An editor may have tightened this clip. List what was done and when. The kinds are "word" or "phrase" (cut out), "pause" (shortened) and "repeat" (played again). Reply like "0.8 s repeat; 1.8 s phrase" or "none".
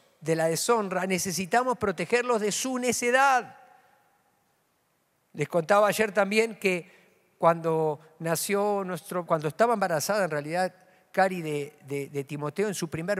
9.3 s word